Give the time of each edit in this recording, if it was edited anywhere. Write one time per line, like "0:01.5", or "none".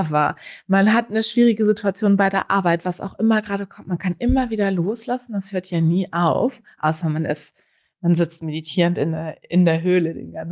none